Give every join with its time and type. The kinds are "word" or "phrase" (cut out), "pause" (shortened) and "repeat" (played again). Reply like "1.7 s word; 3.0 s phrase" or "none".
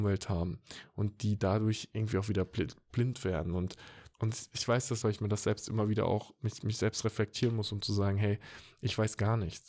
4.1 s pause; 5.0 s phrase